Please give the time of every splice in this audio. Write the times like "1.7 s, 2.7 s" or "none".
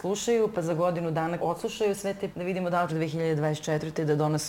1.4 s, 2.3 s, 2.9 s